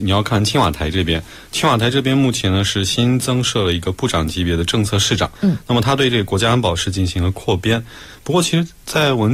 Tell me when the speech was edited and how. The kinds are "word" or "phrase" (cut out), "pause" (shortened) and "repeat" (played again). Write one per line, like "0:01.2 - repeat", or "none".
0:05.3 - pause